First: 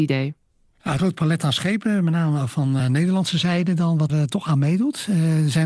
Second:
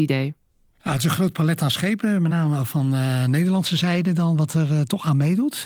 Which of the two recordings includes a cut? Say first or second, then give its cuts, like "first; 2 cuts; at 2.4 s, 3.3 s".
first; 3 cuts; at 1.0 s, 2.8 s, 4.1 s